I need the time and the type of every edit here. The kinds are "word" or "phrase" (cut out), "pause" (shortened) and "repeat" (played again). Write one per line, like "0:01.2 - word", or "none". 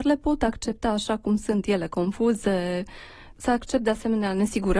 none